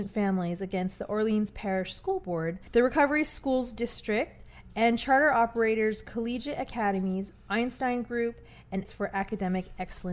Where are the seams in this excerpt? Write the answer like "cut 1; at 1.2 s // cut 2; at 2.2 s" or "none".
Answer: cut 1; at 8.8 s